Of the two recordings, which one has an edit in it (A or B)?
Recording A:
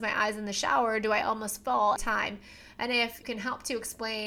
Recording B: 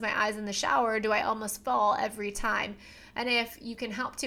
A